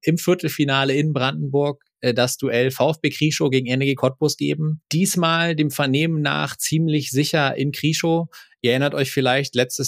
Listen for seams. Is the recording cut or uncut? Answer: uncut